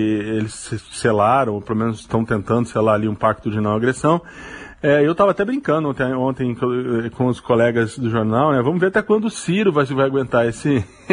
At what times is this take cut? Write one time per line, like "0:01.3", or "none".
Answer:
none